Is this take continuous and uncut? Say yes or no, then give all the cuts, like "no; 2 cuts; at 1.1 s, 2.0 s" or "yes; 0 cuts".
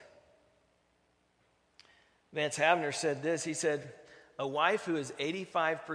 yes; 0 cuts